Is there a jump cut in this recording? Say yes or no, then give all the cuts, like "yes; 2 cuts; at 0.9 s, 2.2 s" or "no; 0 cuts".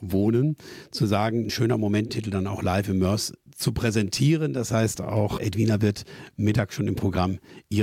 yes; 3 cuts; at 1.5 s, 2.1 s, 5.4 s